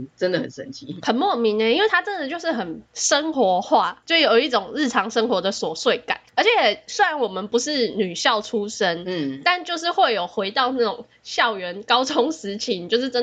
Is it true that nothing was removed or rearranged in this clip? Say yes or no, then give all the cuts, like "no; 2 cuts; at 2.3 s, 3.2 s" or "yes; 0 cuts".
yes; 0 cuts